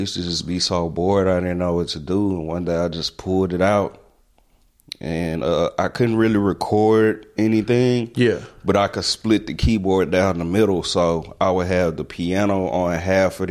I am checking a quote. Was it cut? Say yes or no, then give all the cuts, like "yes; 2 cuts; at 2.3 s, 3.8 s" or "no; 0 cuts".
no; 0 cuts